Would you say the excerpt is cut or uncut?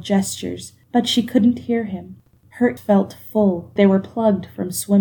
cut